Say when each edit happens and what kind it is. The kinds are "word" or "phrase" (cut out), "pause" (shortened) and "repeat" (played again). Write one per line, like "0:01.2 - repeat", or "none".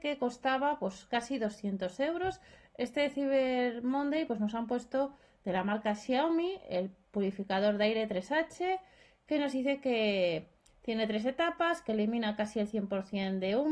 none